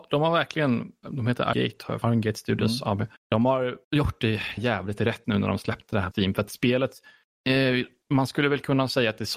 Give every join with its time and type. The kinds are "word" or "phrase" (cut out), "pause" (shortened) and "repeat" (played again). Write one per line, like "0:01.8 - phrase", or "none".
0:01.0 - word
0:01.5 - word
0:02.0 - phrase
0:03.2 - pause
0:03.8 - pause
0:04.6 - word
0:05.2 - word
0:06.1 - word